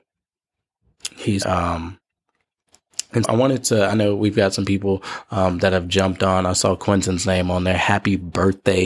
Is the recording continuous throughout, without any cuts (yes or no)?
no